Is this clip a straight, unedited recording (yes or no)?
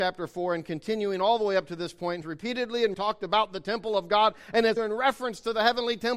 no